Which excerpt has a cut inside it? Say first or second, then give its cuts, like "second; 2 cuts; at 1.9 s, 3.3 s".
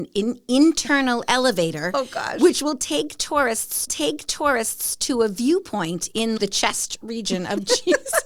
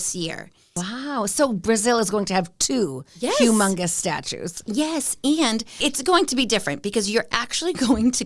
first; 2 cuts; at 3.9 s, 6.4 s